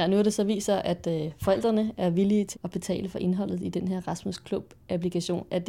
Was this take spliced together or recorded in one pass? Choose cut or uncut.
cut